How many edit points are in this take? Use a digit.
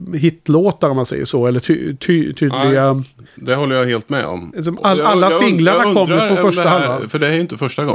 0